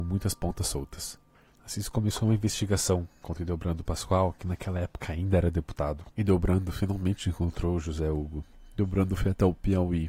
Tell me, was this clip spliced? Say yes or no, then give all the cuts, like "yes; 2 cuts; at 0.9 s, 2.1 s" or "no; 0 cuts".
no; 0 cuts